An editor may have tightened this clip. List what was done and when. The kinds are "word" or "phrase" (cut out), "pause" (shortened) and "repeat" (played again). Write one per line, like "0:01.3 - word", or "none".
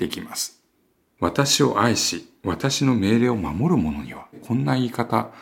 0:04.3 - word